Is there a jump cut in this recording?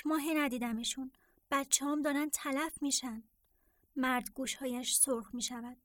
no; 0 cuts

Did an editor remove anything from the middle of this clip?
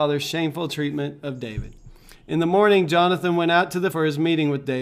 yes; 1 cut; at 3.9 s

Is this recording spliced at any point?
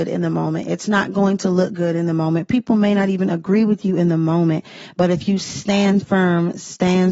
no; 0 cuts

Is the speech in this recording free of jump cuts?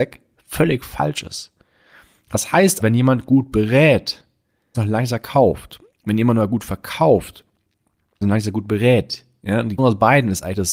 no; 4 cuts; at 2.8 s, 4.7 s, 8.2 s, 9.8 s

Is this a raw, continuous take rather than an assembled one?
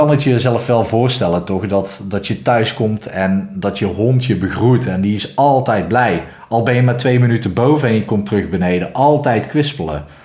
yes; 0 cuts

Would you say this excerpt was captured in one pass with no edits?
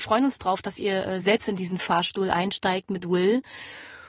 yes; 0 cuts

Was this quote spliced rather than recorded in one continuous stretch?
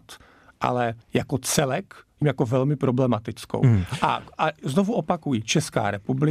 yes; 2 cuts; at 1.0 s, 2.2 s

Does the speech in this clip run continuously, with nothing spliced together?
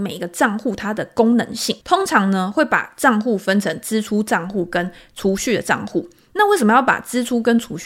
no; 1 cut; at 1.8 s

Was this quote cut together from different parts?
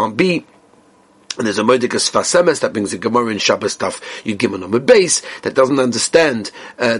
no; 0 cuts

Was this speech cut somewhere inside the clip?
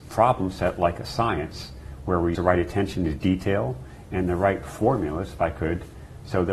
yes; 1 cut; at 2.3 s

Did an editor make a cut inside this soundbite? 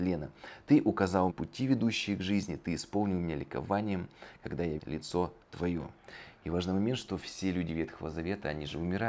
yes; 2 cuts; at 1.3 s, 4.8 s

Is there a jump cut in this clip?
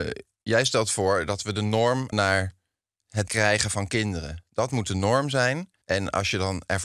yes; 3 cuts; at 2.1 s, 3.3 s, 5.8 s

